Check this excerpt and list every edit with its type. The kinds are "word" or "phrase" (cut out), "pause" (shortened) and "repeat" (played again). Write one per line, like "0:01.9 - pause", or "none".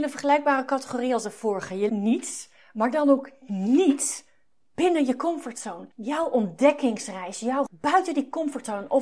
0:01.9 - word
0:07.7 - phrase